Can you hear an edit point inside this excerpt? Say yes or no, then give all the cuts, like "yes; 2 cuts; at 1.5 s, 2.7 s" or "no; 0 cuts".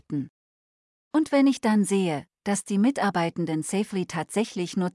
no; 0 cuts